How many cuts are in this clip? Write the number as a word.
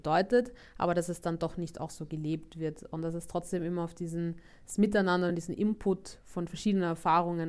zero